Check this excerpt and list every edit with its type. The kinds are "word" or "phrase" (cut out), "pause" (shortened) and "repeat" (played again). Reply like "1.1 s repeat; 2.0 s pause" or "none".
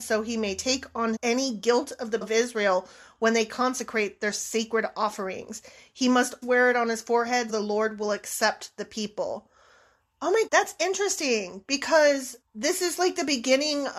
1.2 s word; 2.2 s word; 6.4 s word; 7.5 s word; 10.5 s word; 12.4 s word